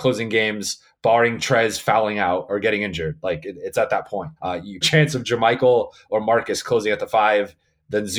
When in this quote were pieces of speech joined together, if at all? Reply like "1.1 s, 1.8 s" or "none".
2.5 s, 4.4 s, 4.8 s